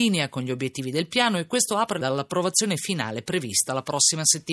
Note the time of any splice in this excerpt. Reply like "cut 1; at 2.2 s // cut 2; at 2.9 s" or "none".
cut 1; at 2.0 s